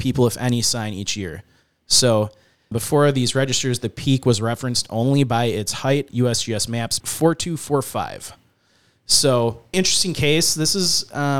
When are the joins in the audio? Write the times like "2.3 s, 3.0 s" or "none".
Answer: 2.7 s, 6.1 s, 7.0 s, 9.7 s